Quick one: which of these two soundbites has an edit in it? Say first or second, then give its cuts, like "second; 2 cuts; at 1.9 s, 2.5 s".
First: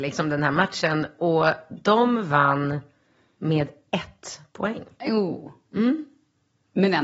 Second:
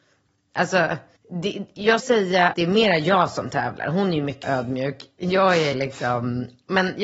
second; 5 cuts; at 1.2 s, 2.0 s, 2.5 s, 4.4 s, 5.7 s